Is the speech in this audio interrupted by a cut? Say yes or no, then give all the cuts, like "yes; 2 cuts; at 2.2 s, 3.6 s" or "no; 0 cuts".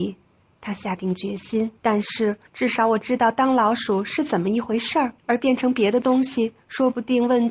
yes; 4 cuts; at 1.8 s, 2.5 s, 5.2 s, 6.6 s